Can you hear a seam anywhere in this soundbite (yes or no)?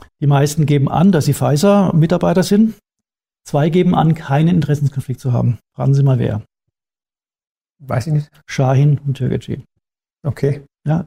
no